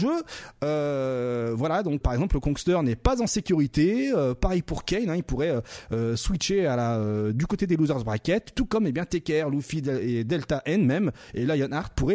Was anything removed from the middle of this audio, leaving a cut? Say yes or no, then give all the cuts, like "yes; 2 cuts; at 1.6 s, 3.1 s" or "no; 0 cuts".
yes; 1 cut; at 2.0 s